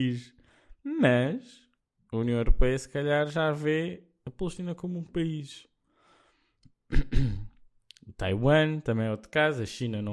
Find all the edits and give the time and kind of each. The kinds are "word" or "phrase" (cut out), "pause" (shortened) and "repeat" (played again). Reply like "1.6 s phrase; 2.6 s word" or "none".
1.8 s pause